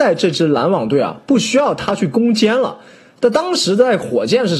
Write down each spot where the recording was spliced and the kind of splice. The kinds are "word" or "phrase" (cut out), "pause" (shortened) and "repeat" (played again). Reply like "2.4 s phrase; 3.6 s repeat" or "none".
none